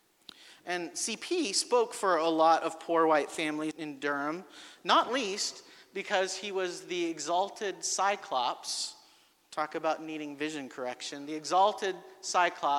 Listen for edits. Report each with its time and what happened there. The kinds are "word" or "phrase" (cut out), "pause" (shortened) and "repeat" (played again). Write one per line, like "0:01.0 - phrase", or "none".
0:03.7 - word